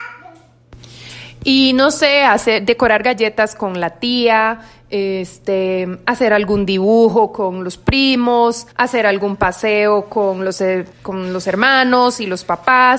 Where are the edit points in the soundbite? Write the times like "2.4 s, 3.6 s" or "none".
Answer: 8.7 s, 10.9 s